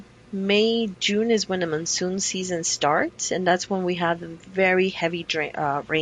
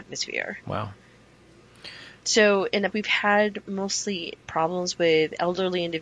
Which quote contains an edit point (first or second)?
second